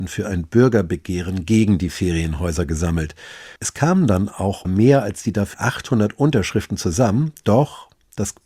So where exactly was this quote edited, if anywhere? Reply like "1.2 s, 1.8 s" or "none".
3.6 s, 4.6 s, 5.5 s